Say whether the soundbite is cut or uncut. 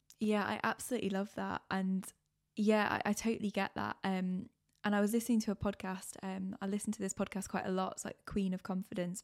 uncut